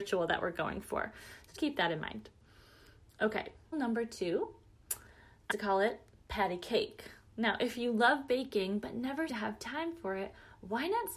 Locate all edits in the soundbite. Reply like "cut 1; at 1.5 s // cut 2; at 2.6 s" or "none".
cut 1; at 1.6 s // cut 2; at 3.7 s // cut 3; at 5.5 s // cut 4; at 9.3 s